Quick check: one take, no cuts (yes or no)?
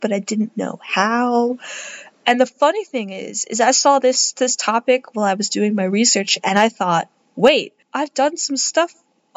no